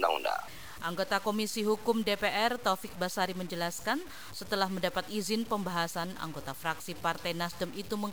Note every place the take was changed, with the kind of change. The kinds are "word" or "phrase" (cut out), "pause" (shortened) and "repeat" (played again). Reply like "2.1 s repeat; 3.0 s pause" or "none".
none